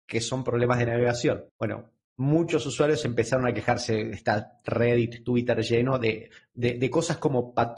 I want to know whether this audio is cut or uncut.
cut